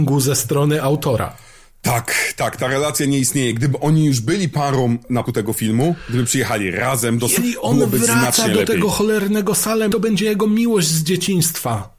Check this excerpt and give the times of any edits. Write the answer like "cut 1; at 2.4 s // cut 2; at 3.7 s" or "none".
cut 1; at 5.3 s // cut 2; at 7.4 s // cut 3; at 9.9 s